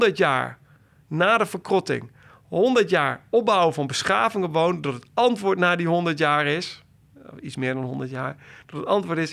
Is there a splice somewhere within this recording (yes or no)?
no